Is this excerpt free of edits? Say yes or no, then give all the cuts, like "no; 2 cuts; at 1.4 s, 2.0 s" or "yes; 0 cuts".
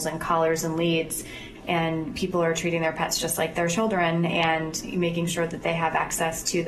yes; 0 cuts